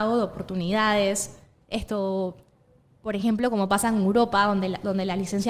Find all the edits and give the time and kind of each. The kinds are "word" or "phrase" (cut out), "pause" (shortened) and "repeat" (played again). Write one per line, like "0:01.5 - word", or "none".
none